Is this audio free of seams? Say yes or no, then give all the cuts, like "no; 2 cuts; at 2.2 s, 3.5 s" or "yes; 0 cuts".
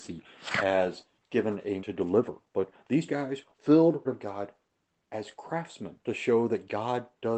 no; 7 cuts; at 1.2 s, 1.8 s, 2.5 s, 3.1 s, 3.5 s, 4.0 s, 6.0 s